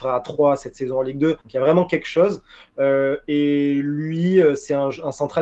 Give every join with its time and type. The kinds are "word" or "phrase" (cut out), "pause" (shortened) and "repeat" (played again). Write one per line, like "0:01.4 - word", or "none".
0:01.4 - pause